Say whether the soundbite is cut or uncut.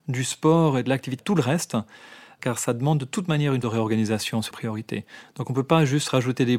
cut